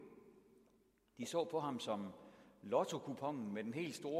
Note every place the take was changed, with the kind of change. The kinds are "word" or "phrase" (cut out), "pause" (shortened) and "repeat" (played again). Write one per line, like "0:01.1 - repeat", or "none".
none